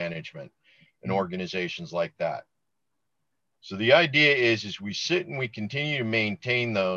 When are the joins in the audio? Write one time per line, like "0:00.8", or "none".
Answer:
none